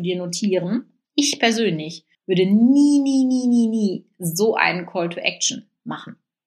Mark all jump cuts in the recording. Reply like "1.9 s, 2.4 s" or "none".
1.0 s, 2.1 s